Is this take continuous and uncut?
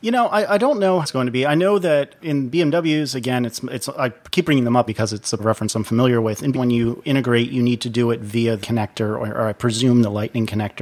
no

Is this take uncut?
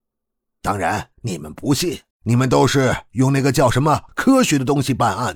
no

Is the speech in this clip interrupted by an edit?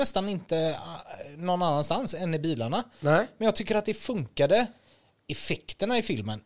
no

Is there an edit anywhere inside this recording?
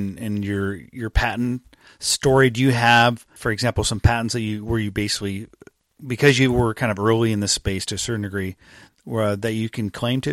yes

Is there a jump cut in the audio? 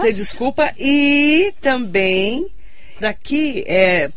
yes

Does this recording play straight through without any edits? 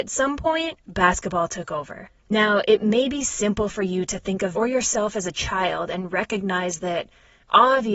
no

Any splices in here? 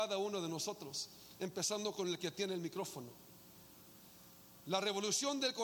no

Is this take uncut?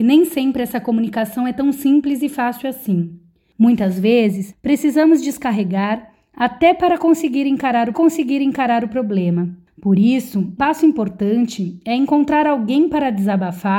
no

